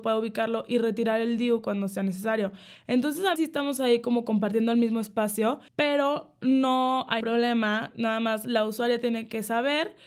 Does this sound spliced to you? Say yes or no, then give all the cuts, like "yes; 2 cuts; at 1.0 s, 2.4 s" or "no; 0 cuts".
yes; 3 cuts; at 3.4 s, 5.7 s, 7.2 s